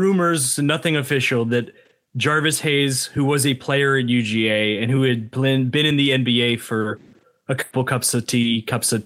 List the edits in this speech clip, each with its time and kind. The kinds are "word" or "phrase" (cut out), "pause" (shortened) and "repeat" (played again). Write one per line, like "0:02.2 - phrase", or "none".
none